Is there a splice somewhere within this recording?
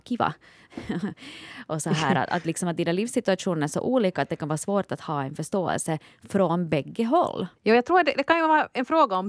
yes; 1 cut; at 7.6 s

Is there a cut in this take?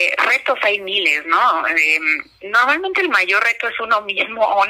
no; 0 cuts

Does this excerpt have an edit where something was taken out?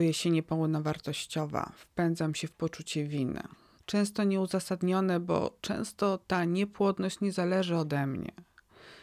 yes; 1 cut; at 3.8 s

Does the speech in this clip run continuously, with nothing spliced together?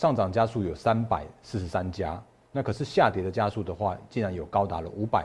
yes; 0 cuts

